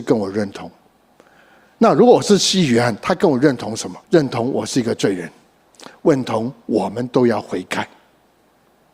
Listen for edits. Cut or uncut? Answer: cut